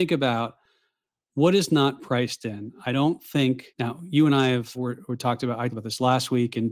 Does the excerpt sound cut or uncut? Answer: cut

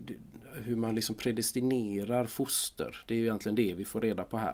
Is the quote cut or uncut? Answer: uncut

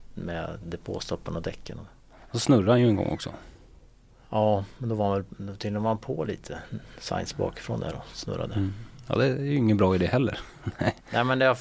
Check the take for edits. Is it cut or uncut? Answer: uncut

